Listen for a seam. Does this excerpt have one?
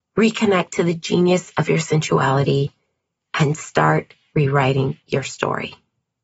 no; 0 cuts

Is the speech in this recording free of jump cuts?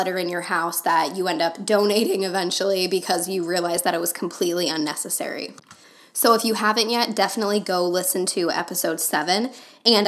yes; 0 cuts

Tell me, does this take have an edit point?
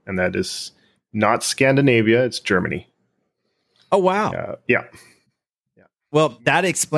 no; 0 cuts

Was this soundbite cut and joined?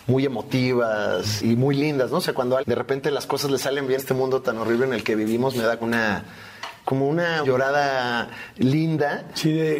yes; 6 cuts; at 1.4 s, 2.6 s, 4.0 s, 5.8 s, 6.8 s, 7.4 s

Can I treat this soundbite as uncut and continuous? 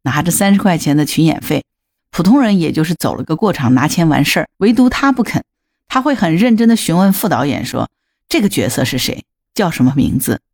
no; 1 cut; at 4.5 s

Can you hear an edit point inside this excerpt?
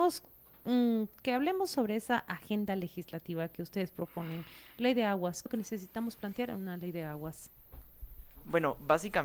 yes; 1 cut; at 5.5 s

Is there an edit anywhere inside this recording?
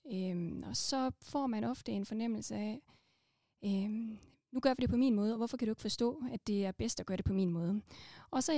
no; 0 cuts

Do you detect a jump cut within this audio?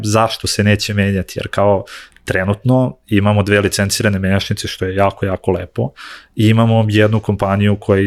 no; 0 cuts

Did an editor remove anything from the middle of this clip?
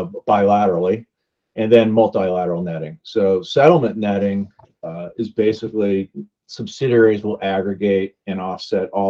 no; 0 cuts

